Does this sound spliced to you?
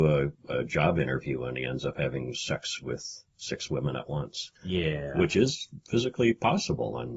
yes; 1 cut; at 4.5 s

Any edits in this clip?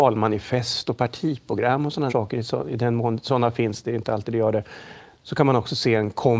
yes; 1 cut; at 2.1 s

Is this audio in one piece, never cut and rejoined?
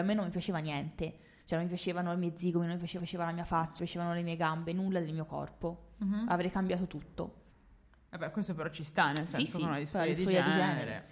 no; 3 cuts; at 3.0 s, 3.8 s, 7.5 s

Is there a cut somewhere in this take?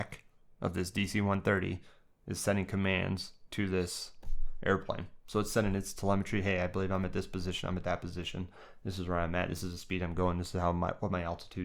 no; 0 cuts

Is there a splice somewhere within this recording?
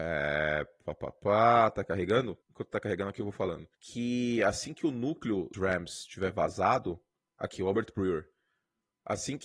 yes; 4 cuts; at 2.4 s, 3.7 s, 5.5 s, 7.2 s

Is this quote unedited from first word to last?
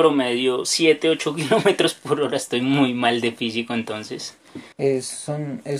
no; 1 cut; at 4.7 s

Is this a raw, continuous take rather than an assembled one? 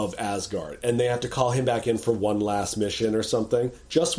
yes; 0 cuts

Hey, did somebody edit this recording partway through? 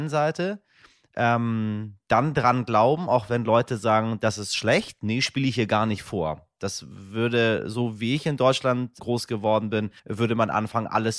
yes; 2 cuts; at 9.0 s, 10.0 s

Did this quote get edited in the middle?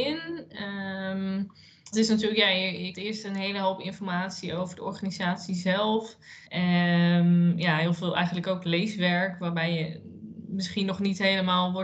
yes; 3 cuts; at 1.9 s, 2.9 s, 6.5 s

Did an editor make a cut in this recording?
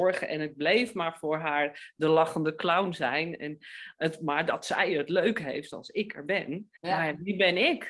yes; 1 cut; at 6.8 s

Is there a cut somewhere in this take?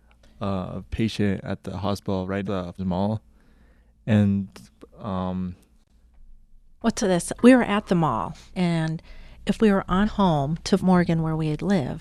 yes; 7 cuts; at 2.4 s, 2.8 s, 4.9 s, 7.0 s, 7.4 s, 10.0 s, 10.8 s

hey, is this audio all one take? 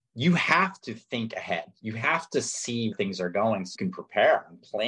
no; 2 cuts; at 2.9 s, 3.8 s

